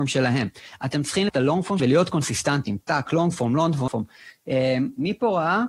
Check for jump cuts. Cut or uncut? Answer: cut